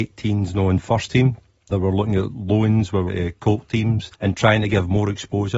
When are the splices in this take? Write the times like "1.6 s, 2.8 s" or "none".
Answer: 1.7 s, 3.1 s, 4.1 s